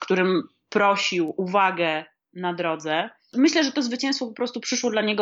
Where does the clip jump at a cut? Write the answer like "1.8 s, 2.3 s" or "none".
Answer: 1.4 s